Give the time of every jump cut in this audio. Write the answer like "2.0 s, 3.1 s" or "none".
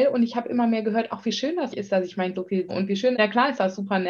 1.7 s, 2.3 s, 2.7 s, 3.1 s